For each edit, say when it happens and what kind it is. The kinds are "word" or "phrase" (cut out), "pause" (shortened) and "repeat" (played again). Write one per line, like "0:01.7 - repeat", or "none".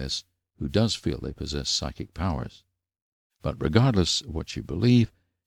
none

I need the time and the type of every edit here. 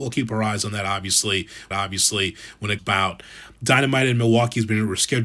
0:01.7 - repeat
0:02.8 - word

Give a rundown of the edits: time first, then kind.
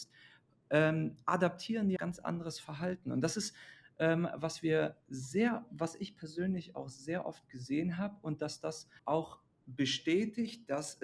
0:02.0 - word
0:09.0 - pause

